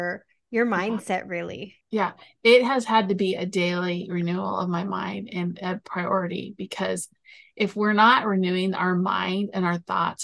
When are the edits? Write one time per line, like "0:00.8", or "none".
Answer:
0:01.8